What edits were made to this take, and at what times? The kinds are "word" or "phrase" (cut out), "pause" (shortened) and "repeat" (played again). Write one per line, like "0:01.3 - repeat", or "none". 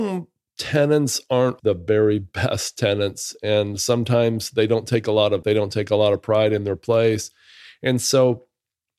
0:01.6 - word
0:05.4 - word